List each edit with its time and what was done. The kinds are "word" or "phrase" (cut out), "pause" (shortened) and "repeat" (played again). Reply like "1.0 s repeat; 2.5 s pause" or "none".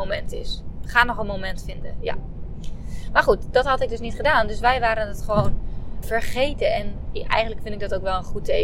6.0 s word